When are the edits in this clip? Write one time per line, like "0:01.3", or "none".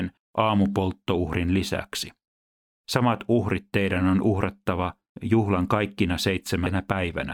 none